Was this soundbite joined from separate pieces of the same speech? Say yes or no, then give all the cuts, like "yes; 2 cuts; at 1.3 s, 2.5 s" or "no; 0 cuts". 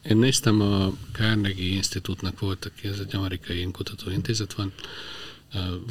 no; 0 cuts